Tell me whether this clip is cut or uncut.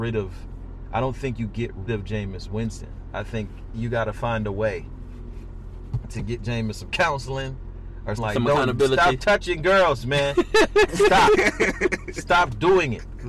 cut